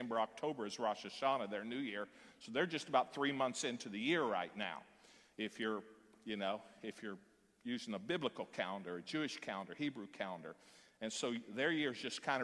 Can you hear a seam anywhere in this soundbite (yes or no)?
no